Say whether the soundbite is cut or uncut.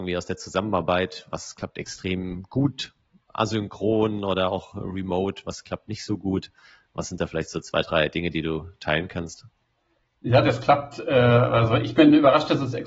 uncut